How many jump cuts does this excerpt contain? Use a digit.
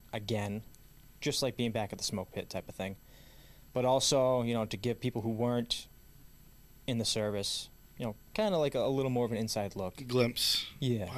0